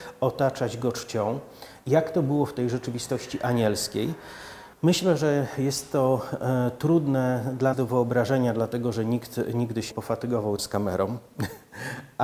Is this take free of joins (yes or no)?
no